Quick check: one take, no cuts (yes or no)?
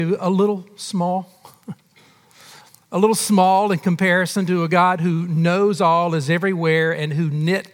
yes